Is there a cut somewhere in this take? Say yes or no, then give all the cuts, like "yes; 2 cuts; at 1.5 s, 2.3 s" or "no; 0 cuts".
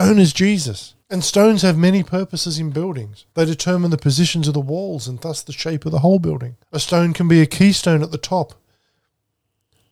yes; 3 cuts; at 1.0 s, 3.3 s, 6.6 s